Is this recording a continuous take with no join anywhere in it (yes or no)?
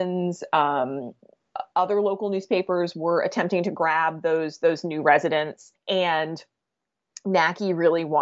no